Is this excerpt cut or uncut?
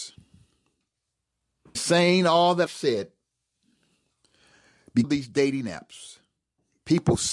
cut